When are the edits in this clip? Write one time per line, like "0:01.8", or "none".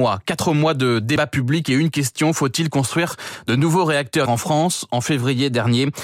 0:04.2